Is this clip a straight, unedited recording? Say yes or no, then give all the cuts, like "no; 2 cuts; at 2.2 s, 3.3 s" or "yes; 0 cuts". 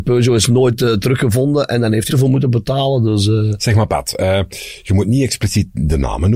no; 1 cut; at 2.1 s